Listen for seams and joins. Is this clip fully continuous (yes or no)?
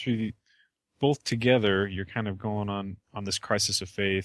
no